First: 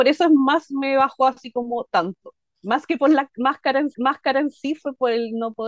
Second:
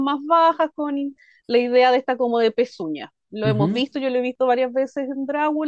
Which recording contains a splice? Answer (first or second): first